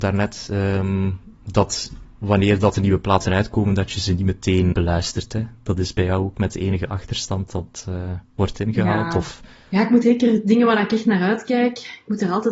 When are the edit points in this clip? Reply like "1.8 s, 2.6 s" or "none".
4.7 s, 7.5 s, 10.0 s